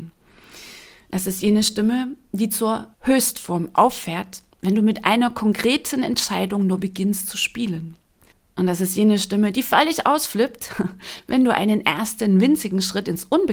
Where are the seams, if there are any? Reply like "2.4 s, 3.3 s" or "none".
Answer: 2.9 s, 4.5 s, 8.3 s